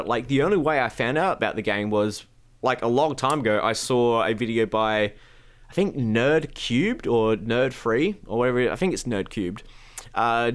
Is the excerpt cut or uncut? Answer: uncut